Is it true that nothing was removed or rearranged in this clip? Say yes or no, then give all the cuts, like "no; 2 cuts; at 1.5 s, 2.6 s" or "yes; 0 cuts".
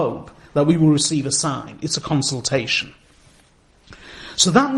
yes; 0 cuts